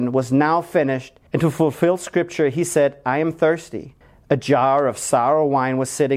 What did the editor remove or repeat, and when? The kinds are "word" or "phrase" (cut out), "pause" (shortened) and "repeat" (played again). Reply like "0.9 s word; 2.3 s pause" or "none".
1.3 s pause; 4.0 s pause